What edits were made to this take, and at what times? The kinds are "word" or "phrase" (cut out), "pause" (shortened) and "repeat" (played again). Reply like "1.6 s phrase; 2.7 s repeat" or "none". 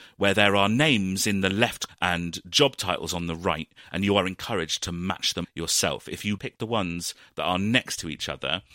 1.9 s word; 5.4 s word; 6.4 s word